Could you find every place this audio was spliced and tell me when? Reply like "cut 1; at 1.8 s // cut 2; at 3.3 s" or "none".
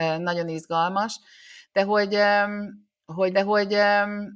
cut 1; at 3.3 s